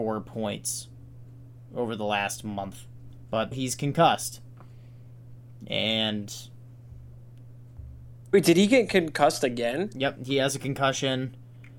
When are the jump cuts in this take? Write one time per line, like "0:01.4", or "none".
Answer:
0:03.5